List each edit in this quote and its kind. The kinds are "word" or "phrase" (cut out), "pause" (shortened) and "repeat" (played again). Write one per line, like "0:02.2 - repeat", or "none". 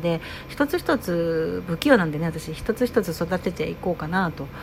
none